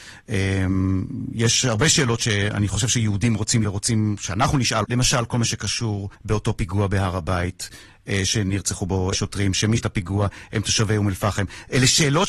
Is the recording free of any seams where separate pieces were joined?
no; 5 cuts; at 3.6 s, 4.8 s, 6.1 s, 9.1 s, 9.8 s

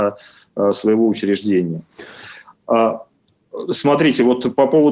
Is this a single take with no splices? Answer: yes; 0 cuts

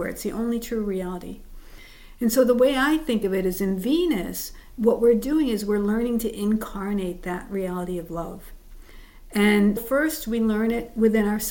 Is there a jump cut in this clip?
yes; 1 cut; at 9.8 s

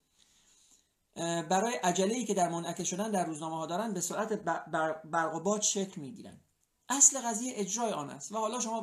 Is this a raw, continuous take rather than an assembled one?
yes; 0 cuts

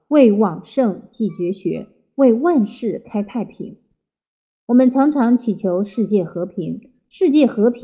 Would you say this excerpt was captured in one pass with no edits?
yes; 0 cuts

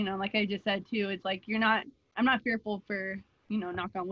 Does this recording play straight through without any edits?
no; 1 cut; at 1.2 s

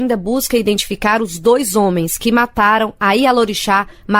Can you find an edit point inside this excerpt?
no; 0 cuts

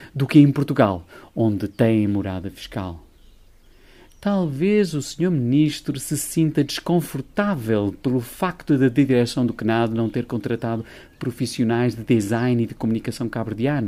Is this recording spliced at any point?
no; 0 cuts

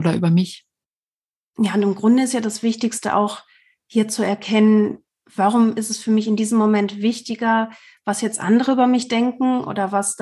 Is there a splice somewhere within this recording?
no; 0 cuts

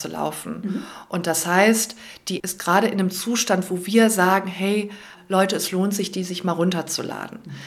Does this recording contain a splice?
yes; 1 cut; at 2.4 s

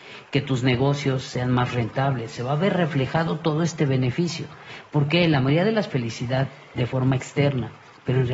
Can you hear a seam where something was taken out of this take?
yes; 1 cut; at 5.9 s

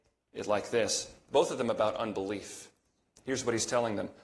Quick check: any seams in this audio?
no; 0 cuts

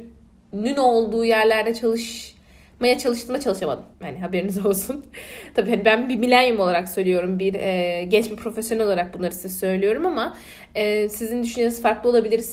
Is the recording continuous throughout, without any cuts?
no; 1 cut; at 3.9 s

